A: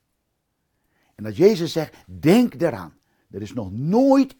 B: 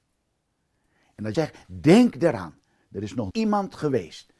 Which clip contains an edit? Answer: B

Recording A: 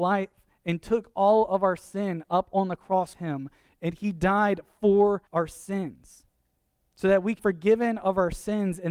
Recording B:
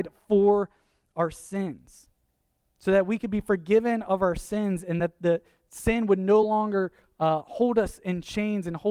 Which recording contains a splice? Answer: A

